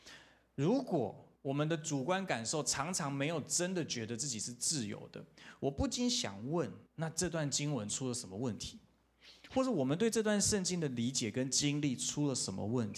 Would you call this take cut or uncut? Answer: cut